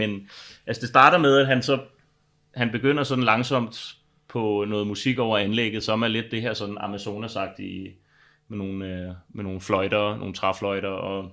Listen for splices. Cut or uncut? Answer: uncut